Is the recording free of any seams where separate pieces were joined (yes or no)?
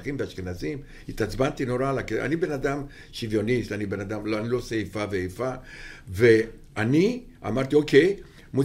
yes